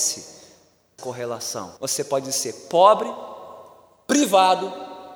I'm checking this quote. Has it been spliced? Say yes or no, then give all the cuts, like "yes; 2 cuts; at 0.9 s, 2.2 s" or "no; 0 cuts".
yes; 2 cuts; at 1.0 s, 1.8 s